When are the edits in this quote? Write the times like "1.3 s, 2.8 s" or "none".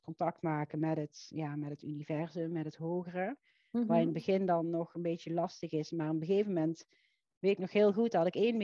none